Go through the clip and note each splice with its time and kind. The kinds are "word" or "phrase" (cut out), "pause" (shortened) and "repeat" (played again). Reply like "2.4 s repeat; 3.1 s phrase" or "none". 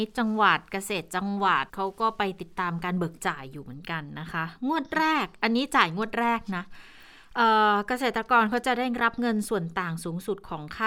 1.7 s pause